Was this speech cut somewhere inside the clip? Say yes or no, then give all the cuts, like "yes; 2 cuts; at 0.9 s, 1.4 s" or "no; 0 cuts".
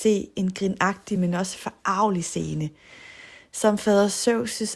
no; 0 cuts